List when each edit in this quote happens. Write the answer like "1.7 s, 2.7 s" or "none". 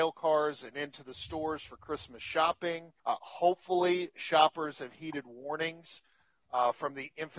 3.0 s